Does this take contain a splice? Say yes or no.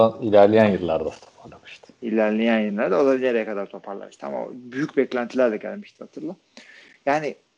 no